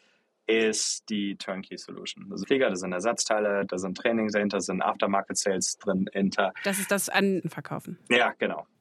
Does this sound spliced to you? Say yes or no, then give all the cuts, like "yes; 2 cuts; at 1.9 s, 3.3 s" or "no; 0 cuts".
yes; 2 cuts; at 2.4 s, 7.4 s